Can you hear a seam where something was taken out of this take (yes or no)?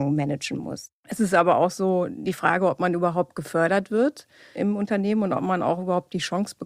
no